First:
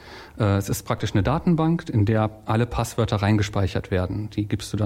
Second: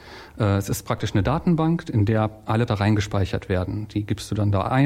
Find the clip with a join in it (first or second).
second